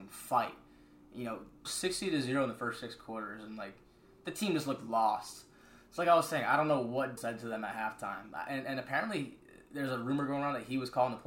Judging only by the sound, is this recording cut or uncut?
cut